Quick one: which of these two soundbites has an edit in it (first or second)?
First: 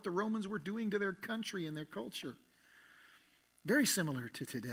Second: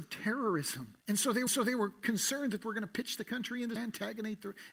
second